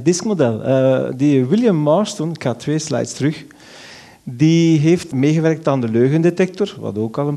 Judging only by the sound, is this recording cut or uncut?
uncut